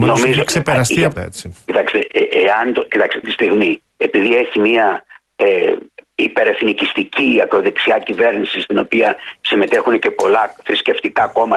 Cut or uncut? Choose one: cut